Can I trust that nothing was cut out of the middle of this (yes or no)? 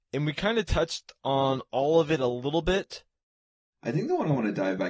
yes